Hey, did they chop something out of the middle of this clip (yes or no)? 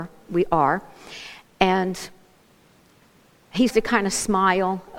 yes